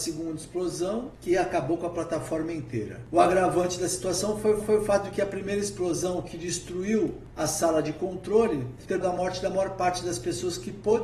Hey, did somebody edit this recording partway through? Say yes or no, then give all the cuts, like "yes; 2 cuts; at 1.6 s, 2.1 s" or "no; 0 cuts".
yes; 2 cuts; at 4.6 s, 9.0 s